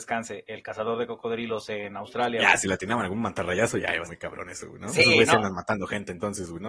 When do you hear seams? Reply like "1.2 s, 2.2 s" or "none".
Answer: 4.0 s